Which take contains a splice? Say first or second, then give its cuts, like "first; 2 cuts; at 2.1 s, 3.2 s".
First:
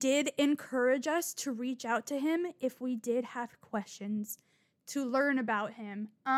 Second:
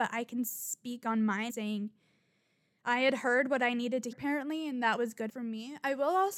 second; 3 cuts; at 1.5 s, 4.1 s, 5.3 s